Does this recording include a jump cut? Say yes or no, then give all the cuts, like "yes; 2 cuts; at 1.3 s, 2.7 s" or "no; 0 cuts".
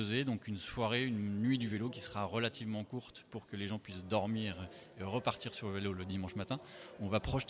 no; 0 cuts